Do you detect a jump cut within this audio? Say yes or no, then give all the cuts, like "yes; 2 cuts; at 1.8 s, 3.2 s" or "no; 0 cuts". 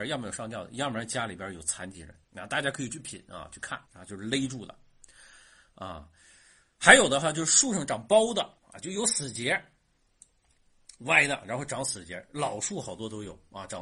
yes; 3 cuts; at 2.2 s, 3.9 s, 8.6 s